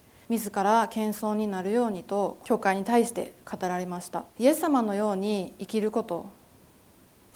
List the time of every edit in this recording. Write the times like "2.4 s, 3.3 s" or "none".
4.3 s